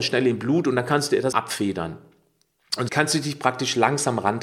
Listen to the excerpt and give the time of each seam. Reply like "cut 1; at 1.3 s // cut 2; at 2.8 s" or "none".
cut 1; at 1.3 s // cut 2; at 2.9 s